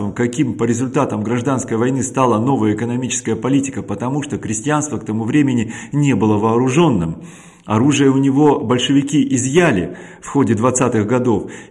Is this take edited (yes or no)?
no